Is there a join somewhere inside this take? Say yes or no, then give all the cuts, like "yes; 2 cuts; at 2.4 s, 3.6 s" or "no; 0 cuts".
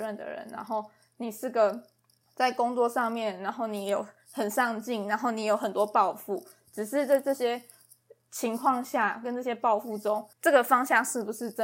yes; 1 cut; at 10.3 s